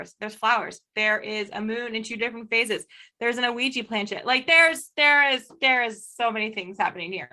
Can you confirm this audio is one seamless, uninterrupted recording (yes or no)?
yes